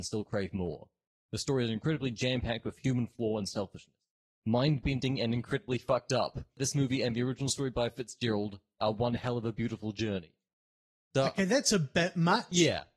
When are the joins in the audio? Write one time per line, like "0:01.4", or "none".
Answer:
none